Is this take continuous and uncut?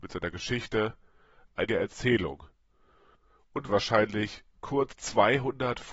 no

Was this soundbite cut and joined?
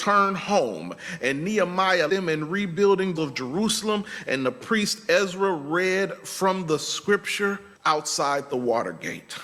yes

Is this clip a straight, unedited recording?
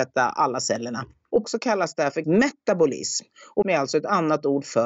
no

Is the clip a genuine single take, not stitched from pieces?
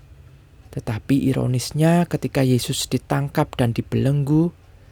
yes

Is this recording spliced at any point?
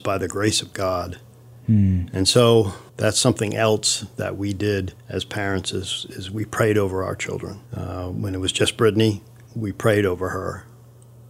yes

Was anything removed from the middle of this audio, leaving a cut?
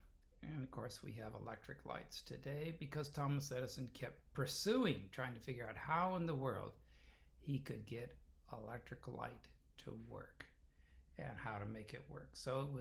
no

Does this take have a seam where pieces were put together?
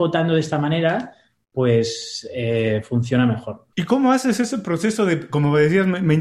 no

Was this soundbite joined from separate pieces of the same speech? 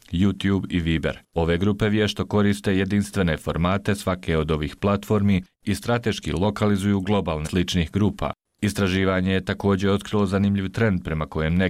yes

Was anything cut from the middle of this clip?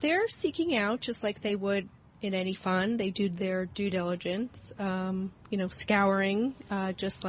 no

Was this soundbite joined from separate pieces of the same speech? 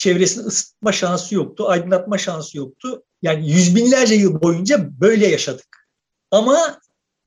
yes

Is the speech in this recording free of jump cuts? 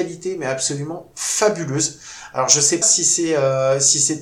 no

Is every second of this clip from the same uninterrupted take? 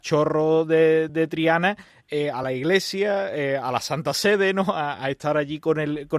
yes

